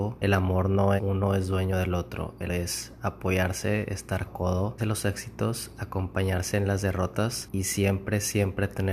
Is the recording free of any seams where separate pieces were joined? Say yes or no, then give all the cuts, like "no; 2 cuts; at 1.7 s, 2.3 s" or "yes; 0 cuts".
no; 4 cuts; at 1.0 s, 2.5 s, 4.3 s, 4.8 s